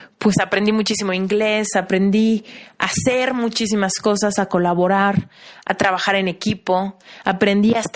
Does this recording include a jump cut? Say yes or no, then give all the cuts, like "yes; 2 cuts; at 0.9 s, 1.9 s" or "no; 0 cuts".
no; 0 cuts